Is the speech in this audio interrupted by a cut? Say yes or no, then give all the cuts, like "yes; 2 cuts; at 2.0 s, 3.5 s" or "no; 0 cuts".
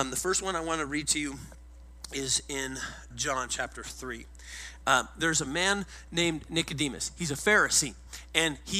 yes; 1 cut; at 3.1 s